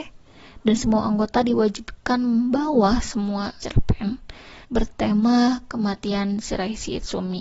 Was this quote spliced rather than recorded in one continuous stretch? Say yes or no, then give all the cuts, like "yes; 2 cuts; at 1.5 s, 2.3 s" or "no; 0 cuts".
yes; 2 cuts; at 3.6 s, 4.6 s